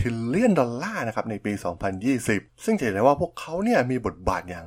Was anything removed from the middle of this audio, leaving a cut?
no; 0 cuts

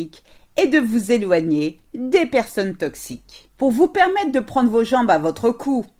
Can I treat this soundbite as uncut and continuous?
yes; 0 cuts

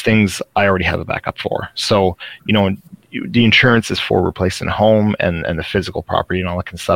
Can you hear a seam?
no; 0 cuts

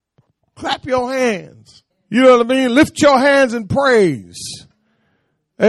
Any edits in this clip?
yes; 1 cut; at 1.9 s

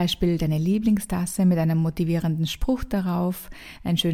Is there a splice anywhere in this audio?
no; 0 cuts

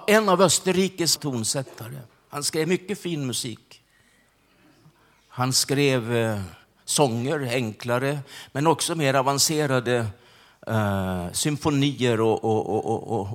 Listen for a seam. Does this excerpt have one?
yes; 1 cut; at 1.2 s

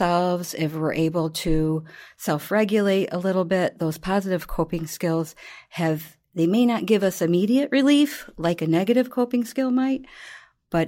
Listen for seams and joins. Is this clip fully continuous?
yes; 0 cuts

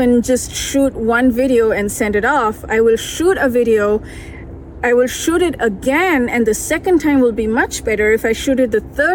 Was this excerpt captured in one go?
yes; 0 cuts

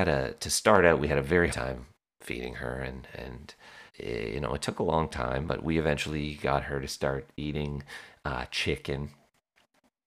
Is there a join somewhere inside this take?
yes; 2 cuts; at 1.5 s, 3.9 s

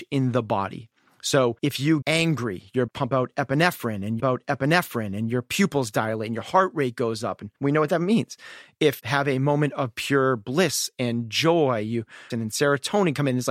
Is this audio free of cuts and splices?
no; 7 cuts; at 1.6 s, 2.0 s, 2.9 s, 4.2 s, 7.6 s, 9.0 s, 12.3 s

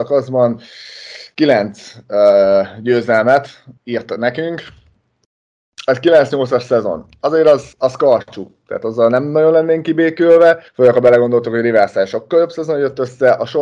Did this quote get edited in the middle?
yes; 3 cuts; at 3.8 s, 7.7 s, 10.7 s

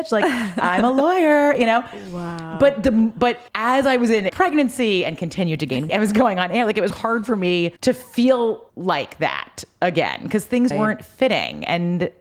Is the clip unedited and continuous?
no; 7 cuts; at 3.5 s, 4.3 s, 5.9 s, 6.9 s, 7.8 s, 8.7 s, 10.7 s

